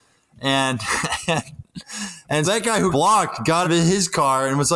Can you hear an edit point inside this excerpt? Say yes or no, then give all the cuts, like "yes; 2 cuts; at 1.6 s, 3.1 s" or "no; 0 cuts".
yes; 3 cuts; at 2.4 s, 2.9 s, 3.6 s